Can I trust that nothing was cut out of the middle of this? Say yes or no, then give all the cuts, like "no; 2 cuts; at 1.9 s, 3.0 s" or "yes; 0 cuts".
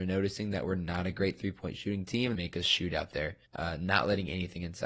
no; 2 cuts; at 2.3 s, 3.4 s